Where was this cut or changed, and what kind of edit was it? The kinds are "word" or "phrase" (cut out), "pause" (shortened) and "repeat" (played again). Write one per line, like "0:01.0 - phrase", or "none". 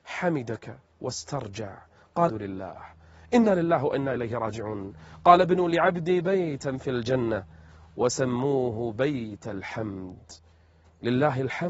0:02.3 - word